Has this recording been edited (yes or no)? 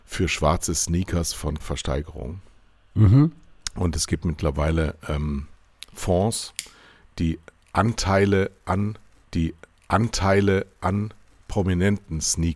yes